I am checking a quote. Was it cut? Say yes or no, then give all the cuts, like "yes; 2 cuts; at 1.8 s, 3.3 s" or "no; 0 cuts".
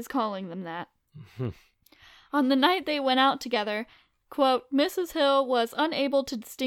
no; 0 cuts